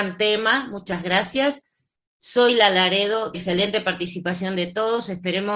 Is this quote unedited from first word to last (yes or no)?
no